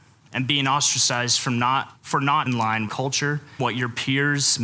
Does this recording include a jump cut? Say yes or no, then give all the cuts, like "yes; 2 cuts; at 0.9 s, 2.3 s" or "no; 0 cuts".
yes; 4 cuts; at 2.0 s, 2.5 s, 2.9 s, 3.6 s